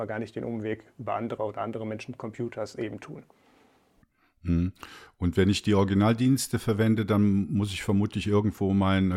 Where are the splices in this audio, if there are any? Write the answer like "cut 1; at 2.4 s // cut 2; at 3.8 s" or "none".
cut 1; at 1.4 s